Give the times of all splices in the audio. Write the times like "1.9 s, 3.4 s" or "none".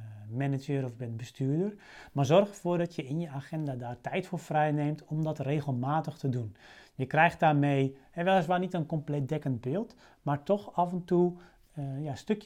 none

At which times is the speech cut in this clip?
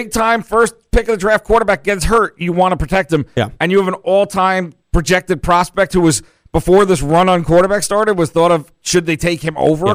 none

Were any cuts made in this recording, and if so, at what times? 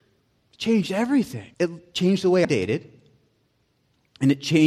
1.5 s, 2.4 s

